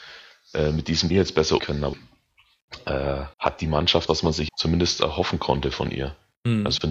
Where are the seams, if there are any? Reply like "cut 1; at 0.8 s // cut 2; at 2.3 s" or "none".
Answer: cut 1; at 1.1 s // cut 2; at 1.6 s // cut 3; at 1.9 s // cut 4; at 3.3 s // cut 5; at 4.1 s // cut 6; at 4.5 s